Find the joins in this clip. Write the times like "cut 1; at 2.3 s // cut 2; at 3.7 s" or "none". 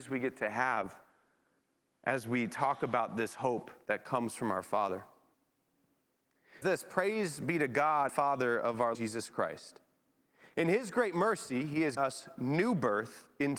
cut 1; at 6.6 s // cut 2; at 8.1 s // cut 3; at 8.9 s // cut 4; at 12.0 s